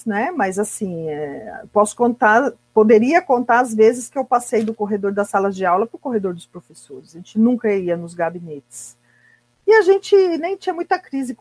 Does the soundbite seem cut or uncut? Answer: uncut